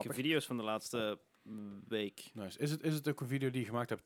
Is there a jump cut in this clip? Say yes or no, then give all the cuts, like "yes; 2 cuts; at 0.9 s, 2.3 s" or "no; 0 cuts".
yes; 1 cut; at 1.4 s